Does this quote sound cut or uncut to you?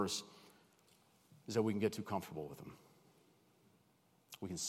uncut